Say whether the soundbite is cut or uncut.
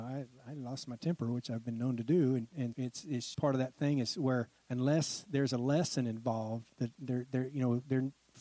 cut